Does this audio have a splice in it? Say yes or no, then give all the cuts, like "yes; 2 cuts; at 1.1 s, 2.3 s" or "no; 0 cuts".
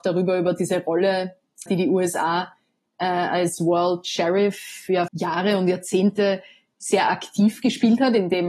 yes; 2 cuts; at 1.7 s, 5.1 s